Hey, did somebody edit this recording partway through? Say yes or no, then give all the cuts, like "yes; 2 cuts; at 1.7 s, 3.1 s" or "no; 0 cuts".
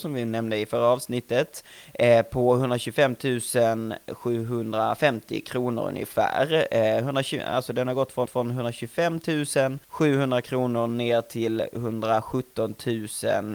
yes; 2 cuts; at 8.3 s, 9.8 s